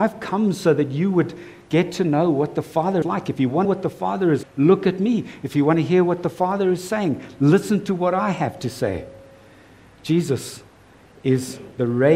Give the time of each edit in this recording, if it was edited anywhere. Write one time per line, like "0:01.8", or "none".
0:03.0
0:03.6
0:04.4